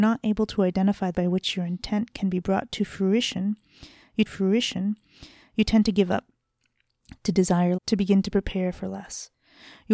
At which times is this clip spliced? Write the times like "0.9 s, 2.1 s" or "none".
1.1 s, 4.3 s, 7.8 s

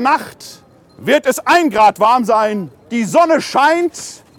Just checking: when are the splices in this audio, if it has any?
2.8 s

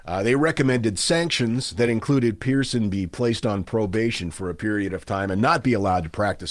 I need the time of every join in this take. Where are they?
none

